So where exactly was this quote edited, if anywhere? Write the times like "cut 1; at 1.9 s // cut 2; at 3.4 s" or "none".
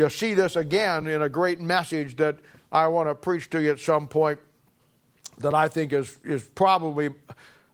none